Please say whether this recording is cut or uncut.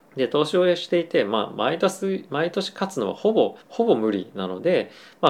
cut